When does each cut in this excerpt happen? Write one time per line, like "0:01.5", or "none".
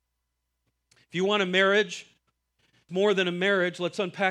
0:02.9